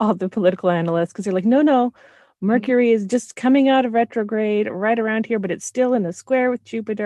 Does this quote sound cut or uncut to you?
uncut